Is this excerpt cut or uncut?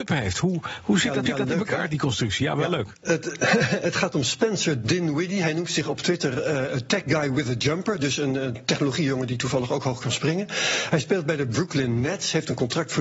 cut